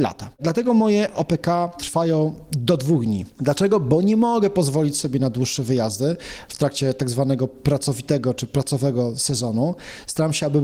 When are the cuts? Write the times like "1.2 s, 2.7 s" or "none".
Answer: none